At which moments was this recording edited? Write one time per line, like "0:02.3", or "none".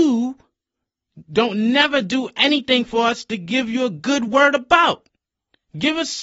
none